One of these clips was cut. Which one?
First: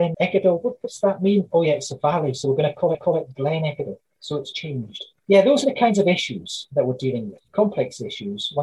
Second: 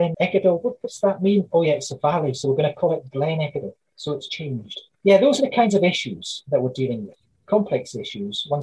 first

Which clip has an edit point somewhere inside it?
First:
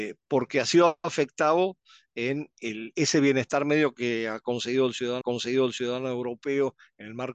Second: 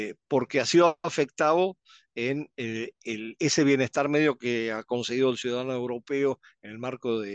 first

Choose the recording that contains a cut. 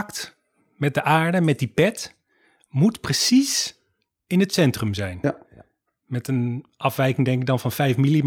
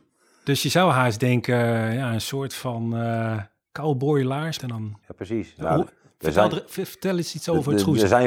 second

